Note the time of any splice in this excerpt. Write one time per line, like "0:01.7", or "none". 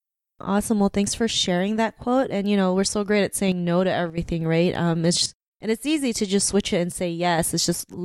none

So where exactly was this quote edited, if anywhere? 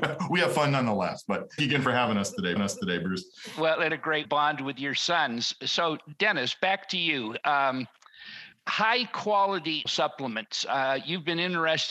0:01.6
0:02.6
0:03.9
0:04.2
0:08.5
0:09.9

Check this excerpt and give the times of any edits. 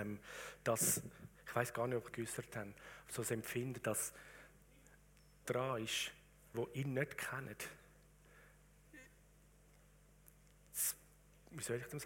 0:02.1
0:05.5
0:06.5

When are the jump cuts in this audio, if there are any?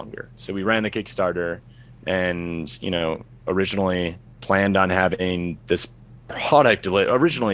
0:04.3

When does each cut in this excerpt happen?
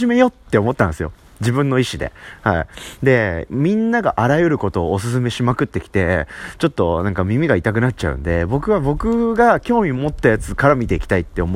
none

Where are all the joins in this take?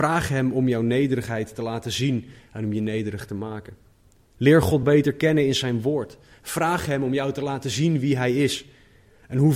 none

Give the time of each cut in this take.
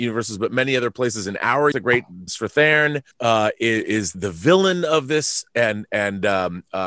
0:01.7
0:02.3
0:03.1
0:04.1

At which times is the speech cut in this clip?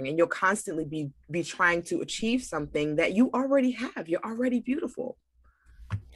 none

